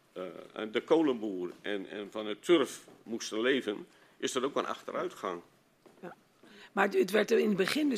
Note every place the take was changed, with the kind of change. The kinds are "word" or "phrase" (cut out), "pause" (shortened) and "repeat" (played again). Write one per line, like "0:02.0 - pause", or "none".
none